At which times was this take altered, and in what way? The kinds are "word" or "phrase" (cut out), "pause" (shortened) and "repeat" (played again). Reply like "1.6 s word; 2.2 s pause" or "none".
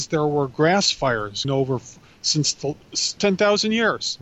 1.4 s word; 3.2 s word